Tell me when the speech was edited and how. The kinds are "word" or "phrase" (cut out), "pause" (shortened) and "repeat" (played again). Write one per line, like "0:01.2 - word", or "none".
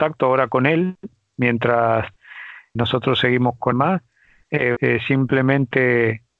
0:02.8 - word
0:03.7 - word
0:04.8 - word